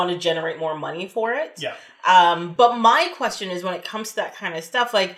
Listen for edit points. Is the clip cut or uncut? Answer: uncut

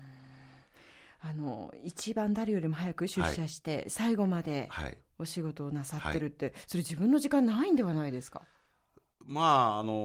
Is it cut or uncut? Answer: uncut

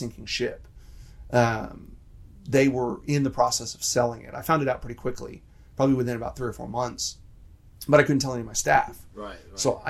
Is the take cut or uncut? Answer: uncut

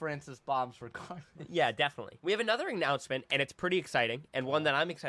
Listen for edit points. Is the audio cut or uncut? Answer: uncut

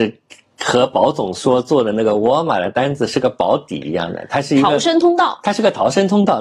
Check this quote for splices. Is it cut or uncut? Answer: uncut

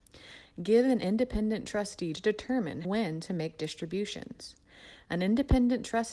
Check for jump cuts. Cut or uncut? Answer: cut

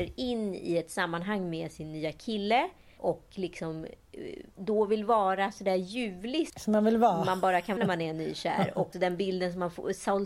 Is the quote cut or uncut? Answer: cut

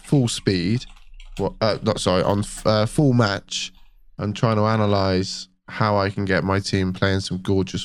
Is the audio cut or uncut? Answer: uncut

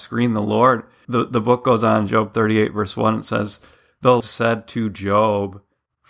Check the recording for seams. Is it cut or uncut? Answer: cut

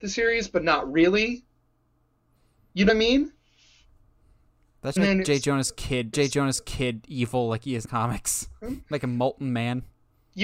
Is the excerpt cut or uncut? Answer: cut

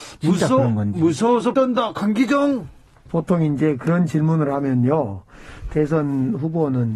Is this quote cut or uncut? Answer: cut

